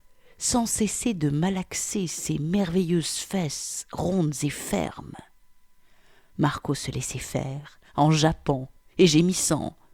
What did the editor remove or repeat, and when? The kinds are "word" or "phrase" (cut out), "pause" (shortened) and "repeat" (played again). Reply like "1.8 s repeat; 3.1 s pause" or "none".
none